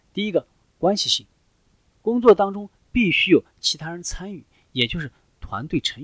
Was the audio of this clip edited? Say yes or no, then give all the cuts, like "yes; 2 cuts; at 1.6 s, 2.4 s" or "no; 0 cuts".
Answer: yes; 1 cut; at 1.8 s